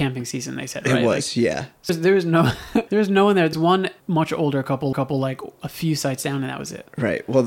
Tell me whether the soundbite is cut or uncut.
cut